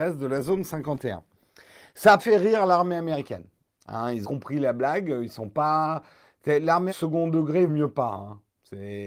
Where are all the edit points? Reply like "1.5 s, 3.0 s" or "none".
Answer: 2.2 s, 4.2 s, 6.9 s, 7.7 s

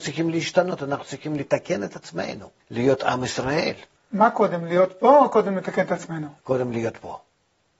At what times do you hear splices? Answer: 2.6 s, 4.0 s, 6.4 s

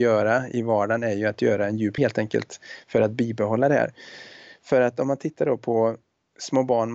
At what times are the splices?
2.0 s

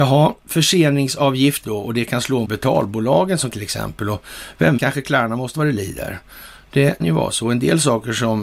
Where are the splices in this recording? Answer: 1.6 s, 2.4 s, 3.5 s, 4.8 s, 5.5 s, 7.0 s

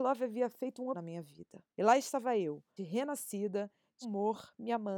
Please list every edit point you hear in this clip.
0.9 s, 1.7 s, 2.8 s, 4.0 s

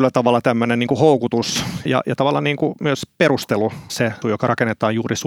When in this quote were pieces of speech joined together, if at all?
1.9 s, 2.2 s, 3.9 s, 4.2 s

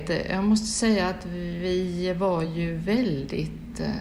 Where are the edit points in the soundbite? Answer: none

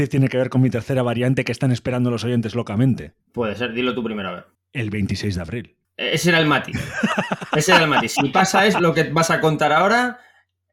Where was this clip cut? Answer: 3.2 s, 4.5 s, 5.8 s

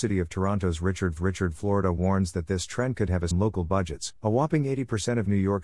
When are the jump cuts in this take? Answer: 1.2 s, 3.3 s, 4.2 s

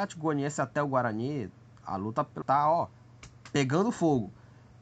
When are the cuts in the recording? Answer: 2.4 s

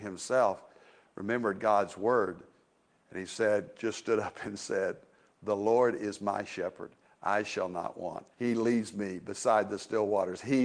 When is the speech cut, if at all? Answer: 8.3 s

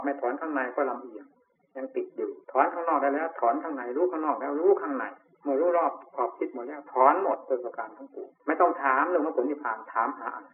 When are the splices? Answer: 1.5 s, 2.4 s, 5.3 s, 8.4 s

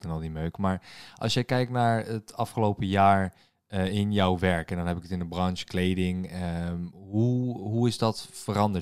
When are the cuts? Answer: none

